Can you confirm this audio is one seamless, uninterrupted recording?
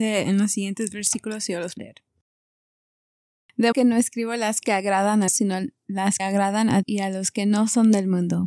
no; 6 cuts; at 1.8 s, 3.7 s, 4.6 s, 5.3 s, 6.2 s, 6.8 s

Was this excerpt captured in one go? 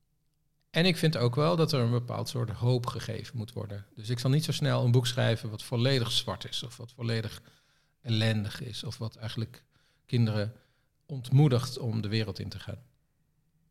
yes; 0 cuts

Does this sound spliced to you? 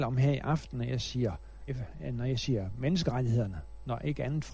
yes; 1 cut; at 1.7 s

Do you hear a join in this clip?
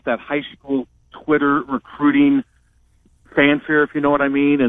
no; 0 cuts

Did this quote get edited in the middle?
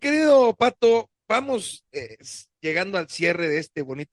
yes; 1 cut; at 1.9 s

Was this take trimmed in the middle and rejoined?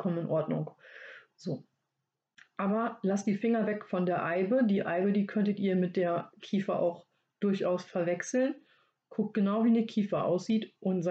no; 0 cuts

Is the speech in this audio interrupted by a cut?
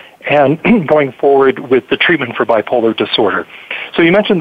yes; 1 cut; at 1.9 s

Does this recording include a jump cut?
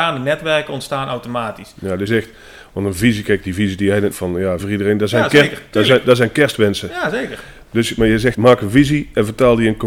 yes; 4 cuts; at 2.1 s, 4.1 s, 4.6 s, 8.3 s

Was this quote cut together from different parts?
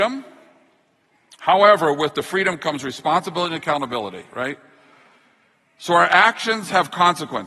no; 0 cuts

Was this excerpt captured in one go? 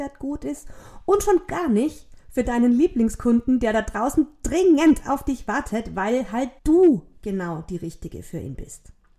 no; 1 cut; at 6.6 s

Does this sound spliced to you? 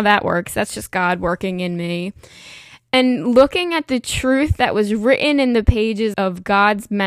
yes; 1 cut; at 6.1 s

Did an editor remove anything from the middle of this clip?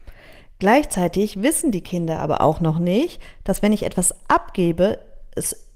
no; 0 cuts

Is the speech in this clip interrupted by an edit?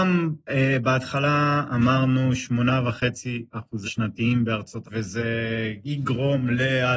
yes; 2 cuts; at 3.8 s, 4.8 s

